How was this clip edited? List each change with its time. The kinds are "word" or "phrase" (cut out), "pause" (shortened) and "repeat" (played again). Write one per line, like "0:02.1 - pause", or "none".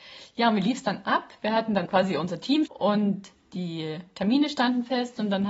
0:01.9 - word
0:02.7 - word

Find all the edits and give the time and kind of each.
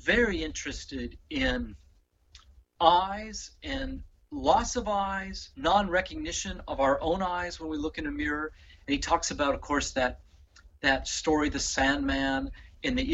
0:05.5 - pause

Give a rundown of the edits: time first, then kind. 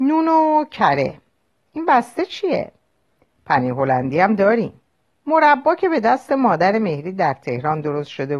0:05.1 - pause

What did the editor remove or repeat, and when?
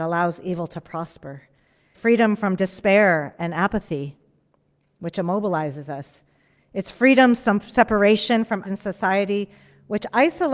0:01.9 - word
0:08.6 - word

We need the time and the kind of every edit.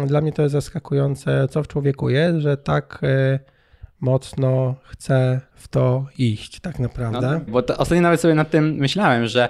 0:05.5 - pause
0:07.5 - word

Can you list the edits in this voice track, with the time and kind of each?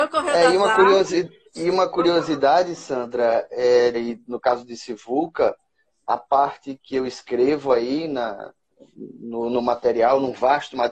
0:01.5 - pause
0:03.9 - phrase
0:06.8 - word

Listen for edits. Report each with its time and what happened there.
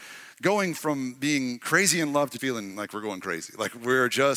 0:02.4 - word

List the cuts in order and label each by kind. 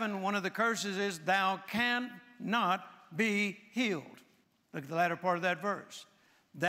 0:04.4 - pause

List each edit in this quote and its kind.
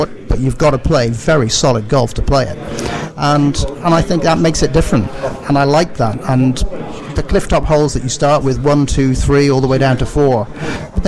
none

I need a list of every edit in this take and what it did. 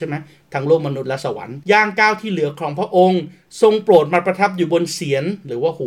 0:01.6 - pause

